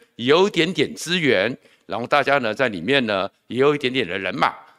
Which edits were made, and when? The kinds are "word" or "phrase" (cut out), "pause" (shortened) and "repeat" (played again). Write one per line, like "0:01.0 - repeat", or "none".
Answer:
none